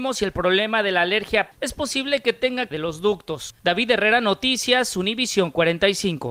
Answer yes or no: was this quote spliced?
yes